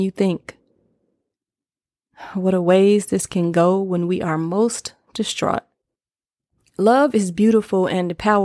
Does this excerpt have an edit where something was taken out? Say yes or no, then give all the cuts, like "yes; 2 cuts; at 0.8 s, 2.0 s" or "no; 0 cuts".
no; 0 cuts